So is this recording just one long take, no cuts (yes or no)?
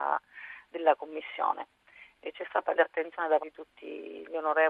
no